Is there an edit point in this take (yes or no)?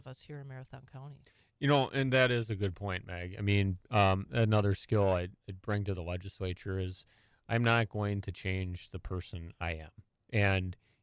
no